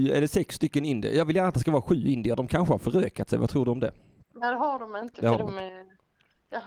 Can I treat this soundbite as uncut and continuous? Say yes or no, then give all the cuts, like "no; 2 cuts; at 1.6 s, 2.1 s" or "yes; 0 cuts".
yes; 0 cuts